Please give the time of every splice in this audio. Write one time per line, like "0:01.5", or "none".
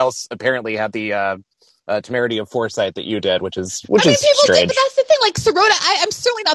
none